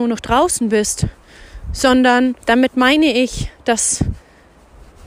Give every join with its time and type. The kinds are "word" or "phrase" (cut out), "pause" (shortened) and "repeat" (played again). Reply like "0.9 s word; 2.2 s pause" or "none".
2.4 s pause